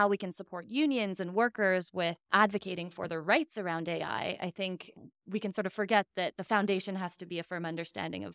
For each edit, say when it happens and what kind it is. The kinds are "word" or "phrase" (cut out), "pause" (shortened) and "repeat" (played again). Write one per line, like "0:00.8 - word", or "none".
0:02.2 - pause
0:05.1 - pause